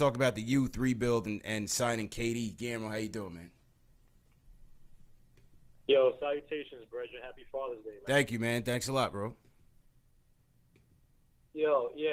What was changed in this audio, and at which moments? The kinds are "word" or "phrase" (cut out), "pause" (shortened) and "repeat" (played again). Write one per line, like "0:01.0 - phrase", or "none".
none